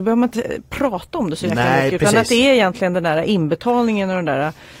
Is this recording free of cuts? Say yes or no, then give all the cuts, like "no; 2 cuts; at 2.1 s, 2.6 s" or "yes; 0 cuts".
yes; 0 cuts